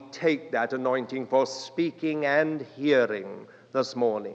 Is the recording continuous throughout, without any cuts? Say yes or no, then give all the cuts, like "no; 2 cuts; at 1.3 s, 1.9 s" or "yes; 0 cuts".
yes; 0 cuts